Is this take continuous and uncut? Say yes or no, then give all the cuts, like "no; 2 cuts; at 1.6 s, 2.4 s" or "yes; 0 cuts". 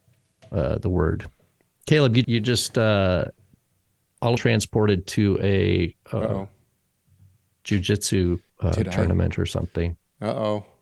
no; 4 cuts; at 2.2 s, 4.4 s, 6.0 s, 8.5 s